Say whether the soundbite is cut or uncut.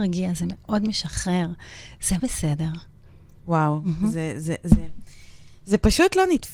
cut